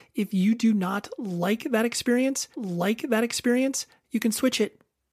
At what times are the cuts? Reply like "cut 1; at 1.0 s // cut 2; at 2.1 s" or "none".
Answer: cut 1; at 2.5 s